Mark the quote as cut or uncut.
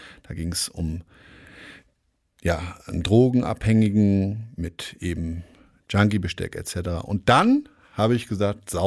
uncut